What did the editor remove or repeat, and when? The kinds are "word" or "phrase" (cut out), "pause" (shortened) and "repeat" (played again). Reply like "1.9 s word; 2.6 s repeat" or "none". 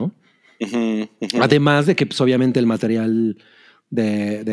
none